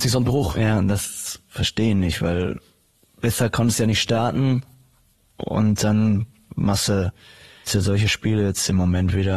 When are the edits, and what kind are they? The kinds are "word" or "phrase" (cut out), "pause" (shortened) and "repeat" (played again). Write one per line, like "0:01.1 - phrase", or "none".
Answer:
0:07.7 - word